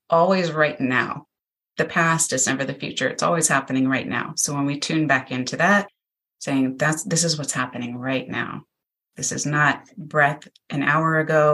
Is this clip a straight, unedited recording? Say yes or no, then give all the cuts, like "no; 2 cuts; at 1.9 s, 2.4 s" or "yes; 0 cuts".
yes; 0 cuts